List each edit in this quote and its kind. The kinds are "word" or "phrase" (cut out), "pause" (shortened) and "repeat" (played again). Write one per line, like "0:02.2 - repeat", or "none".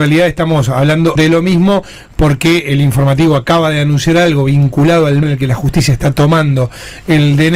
0:01.2 - word
0:05.2 - word